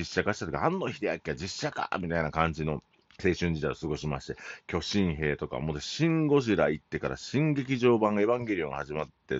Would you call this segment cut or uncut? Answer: cut